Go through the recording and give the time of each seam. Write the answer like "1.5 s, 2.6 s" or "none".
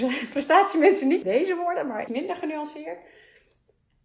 1.2 s, 2.1 s